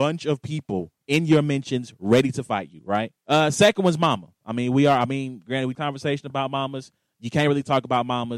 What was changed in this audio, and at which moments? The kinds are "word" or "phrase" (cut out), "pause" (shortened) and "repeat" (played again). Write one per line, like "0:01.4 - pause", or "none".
0:01.0 - pause
0:03.2 - pause
0:05.7 - phrase